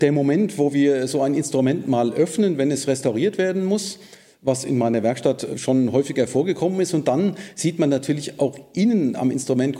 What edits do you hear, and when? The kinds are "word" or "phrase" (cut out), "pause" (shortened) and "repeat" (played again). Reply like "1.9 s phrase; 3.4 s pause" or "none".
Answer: none